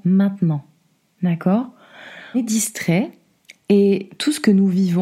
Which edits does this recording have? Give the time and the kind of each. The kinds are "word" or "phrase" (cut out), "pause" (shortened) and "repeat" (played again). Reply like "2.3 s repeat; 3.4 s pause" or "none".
2.3 s word; 3.4 s pause